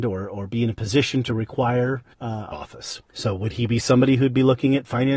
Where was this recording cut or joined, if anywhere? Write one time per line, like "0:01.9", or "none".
0:02.1
0:02.5
0:03.1